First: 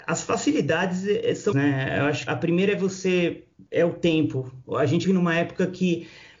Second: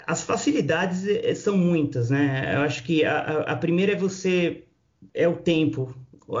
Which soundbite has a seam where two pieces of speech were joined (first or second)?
first